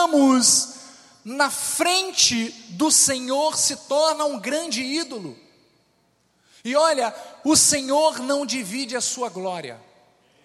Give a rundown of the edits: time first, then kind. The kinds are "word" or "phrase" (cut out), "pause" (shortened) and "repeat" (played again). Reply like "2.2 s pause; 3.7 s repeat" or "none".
none